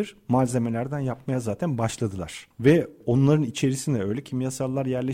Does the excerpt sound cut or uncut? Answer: uncut